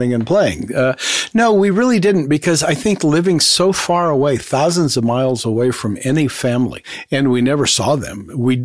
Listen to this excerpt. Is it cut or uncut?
uncut